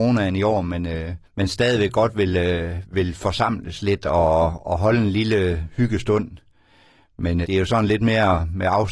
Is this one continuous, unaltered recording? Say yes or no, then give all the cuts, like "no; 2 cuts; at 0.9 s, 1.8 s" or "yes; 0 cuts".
no; 2 cuts; at 1.2 s, 7.4 s